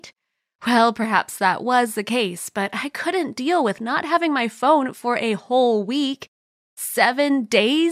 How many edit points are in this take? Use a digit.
0